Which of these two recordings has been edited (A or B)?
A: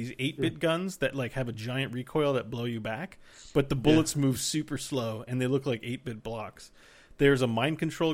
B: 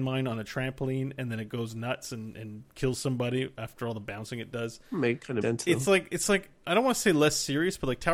B